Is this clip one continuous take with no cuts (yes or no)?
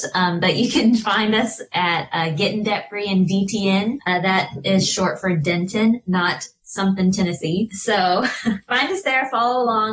yes